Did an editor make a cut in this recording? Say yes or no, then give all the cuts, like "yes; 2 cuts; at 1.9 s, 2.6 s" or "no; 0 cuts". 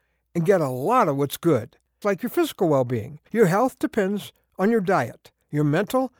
yes; 2 cuts; at 2.0 s, 3.3 s